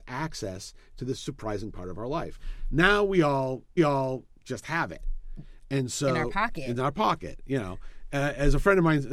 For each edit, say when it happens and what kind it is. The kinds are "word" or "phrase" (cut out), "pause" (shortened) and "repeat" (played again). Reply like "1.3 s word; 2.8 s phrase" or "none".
3.8 s repeat